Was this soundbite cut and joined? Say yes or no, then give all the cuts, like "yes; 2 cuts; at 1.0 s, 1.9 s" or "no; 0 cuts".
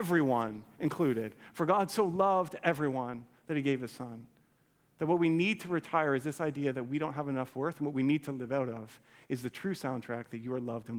no; 0 cuts